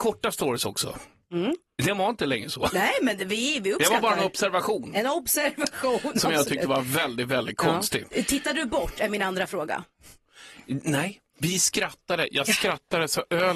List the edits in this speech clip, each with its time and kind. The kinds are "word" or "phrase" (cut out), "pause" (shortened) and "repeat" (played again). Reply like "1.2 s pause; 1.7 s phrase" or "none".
none